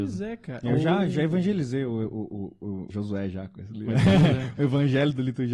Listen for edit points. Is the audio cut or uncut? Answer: cut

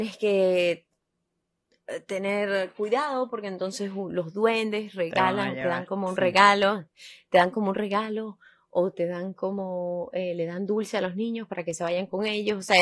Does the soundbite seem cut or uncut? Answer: uncut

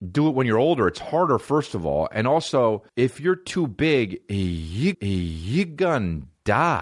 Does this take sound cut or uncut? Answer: cut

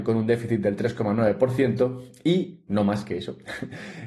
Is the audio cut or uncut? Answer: uncut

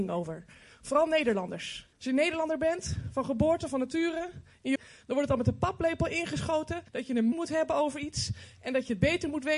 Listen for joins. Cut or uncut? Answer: cut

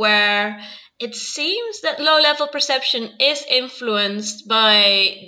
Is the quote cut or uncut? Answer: uncut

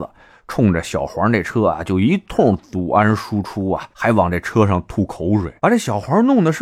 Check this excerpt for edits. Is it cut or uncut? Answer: cut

